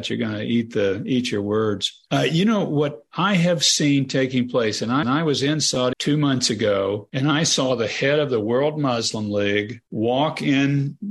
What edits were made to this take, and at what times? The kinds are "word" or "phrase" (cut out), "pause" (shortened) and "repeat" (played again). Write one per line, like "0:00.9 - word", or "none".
0:05.0 - repeat
0:05.9 - word